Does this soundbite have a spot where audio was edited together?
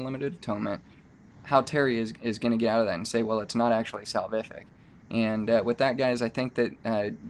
no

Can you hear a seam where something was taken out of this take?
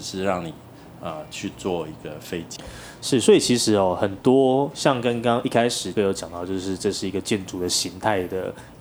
yes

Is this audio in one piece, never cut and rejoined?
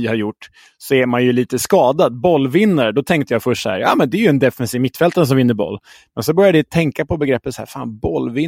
yes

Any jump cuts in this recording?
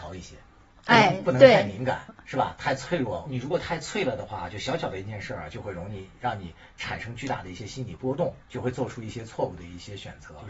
yes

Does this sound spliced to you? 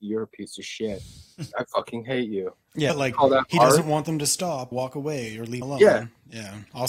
yes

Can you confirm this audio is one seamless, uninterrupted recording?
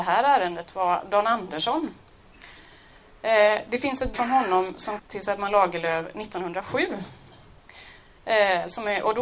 no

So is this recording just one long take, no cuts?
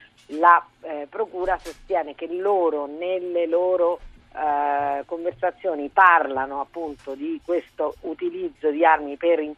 yes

